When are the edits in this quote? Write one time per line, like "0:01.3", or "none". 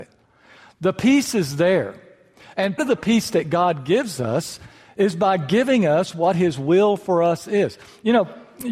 0:02.8